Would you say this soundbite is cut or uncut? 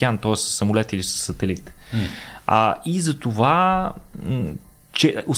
uncut